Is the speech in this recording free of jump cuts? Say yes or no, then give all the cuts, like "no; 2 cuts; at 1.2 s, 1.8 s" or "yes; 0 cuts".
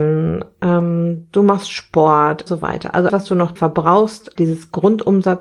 no; 4 cuts; at 2.5 s, 3.1 s, 3.6 s, 4.4 s